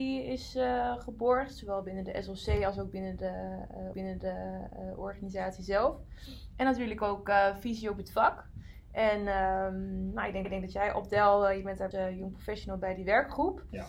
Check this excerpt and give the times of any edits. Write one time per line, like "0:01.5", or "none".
0:03.9
0:10.4
0:11.9